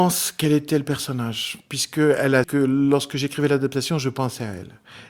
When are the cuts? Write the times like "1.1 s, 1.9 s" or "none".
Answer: 2.4 s